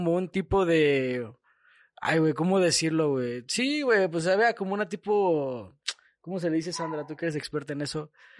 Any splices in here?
no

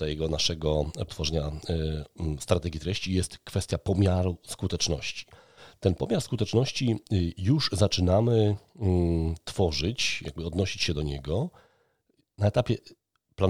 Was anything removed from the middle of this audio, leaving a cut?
yes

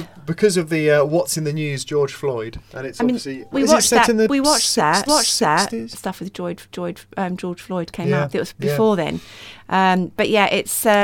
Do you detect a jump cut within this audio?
yes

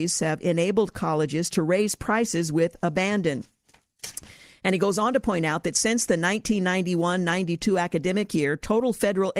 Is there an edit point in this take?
no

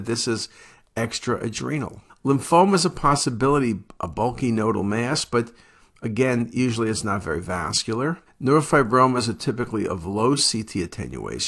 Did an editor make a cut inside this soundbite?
yes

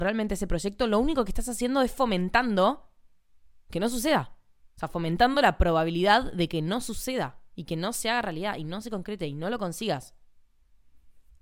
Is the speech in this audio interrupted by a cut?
no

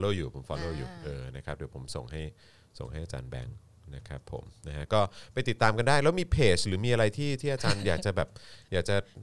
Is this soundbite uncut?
yes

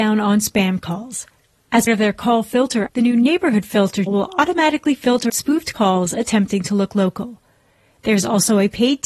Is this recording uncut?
no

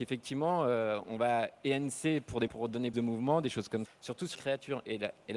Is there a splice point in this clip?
yes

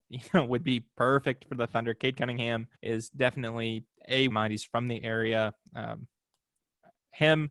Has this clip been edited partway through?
yes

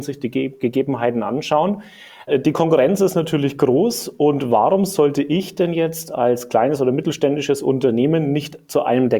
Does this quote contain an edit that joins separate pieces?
no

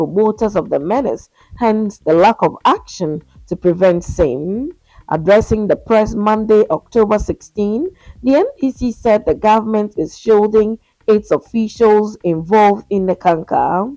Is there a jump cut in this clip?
no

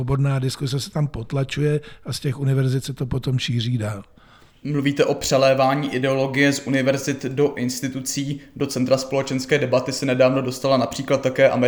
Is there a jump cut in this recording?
no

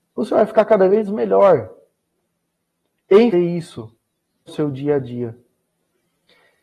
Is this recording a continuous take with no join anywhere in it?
no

